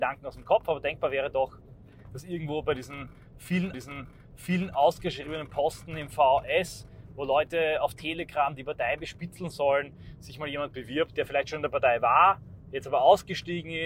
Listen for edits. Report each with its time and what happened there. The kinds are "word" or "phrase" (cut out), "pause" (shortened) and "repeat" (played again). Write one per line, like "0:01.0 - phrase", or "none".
0:03.7 - repeat